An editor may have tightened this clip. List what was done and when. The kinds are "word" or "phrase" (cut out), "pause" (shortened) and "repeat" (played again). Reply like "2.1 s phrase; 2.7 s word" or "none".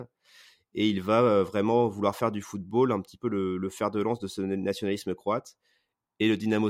none